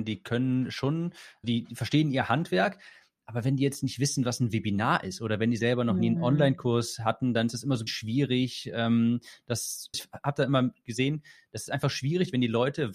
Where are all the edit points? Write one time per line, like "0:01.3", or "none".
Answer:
0:01.4
0:07.9
0:09.9